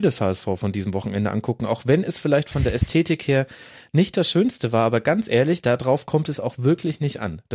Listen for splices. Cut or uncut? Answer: uncut